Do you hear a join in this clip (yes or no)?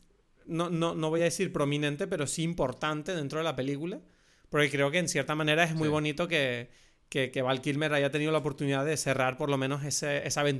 no